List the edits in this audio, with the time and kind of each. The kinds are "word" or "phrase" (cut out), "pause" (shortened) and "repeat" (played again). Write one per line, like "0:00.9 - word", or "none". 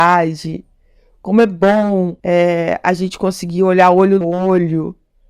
0:02.2 - pause
0:04.2 - word